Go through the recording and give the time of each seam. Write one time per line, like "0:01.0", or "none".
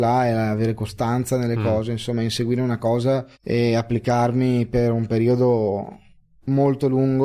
0:03.3